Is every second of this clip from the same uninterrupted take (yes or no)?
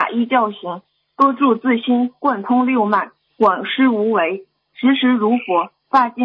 yes